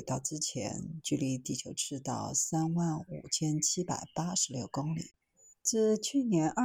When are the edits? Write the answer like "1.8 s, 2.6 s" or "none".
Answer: none

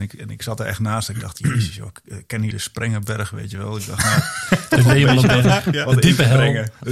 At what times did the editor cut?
2.5 s

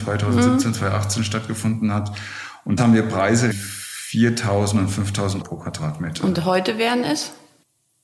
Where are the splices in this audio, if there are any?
2.8 s, 3.5 s, 5.4 s

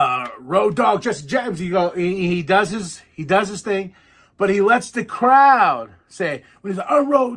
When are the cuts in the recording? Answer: none

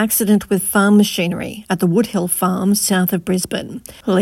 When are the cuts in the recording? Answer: none

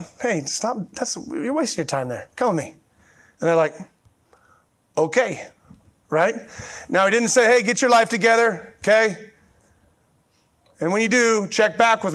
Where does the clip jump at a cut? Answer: none

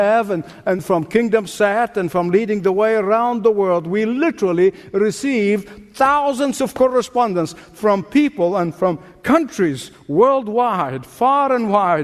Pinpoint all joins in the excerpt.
none

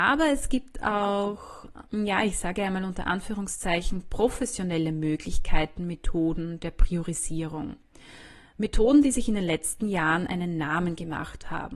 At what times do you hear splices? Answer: 1.9 s

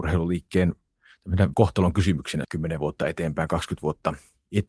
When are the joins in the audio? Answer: 1.5 s, 2.4 s

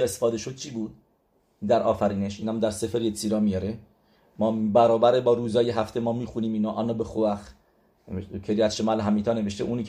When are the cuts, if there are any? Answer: none

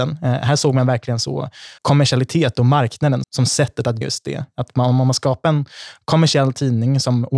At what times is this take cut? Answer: 1.8 s, 3.2 s, 4.0 s

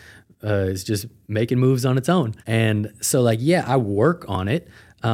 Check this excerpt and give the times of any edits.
2.4 s

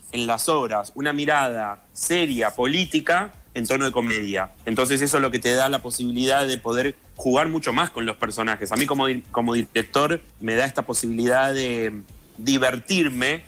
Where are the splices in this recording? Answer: 1.9 s, 4.5 s, 7.0 s, 10.3 s

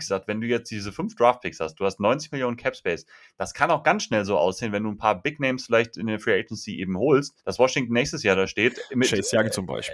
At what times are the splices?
7.4 s

